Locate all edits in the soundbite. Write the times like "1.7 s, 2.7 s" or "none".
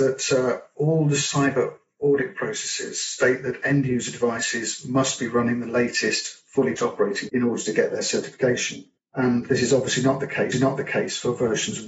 6.8 s, 7.3 s, 9.0 s, 10.5 s